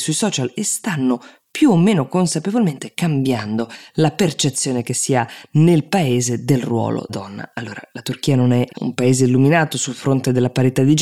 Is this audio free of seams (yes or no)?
no